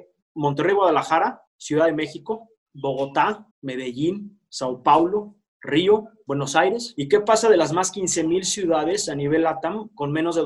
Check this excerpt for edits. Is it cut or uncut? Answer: cut